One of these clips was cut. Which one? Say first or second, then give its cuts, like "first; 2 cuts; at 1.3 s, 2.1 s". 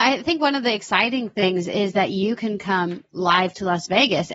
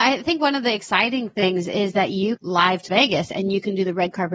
second; 2 cuts; at 2.4 s, 2.9 s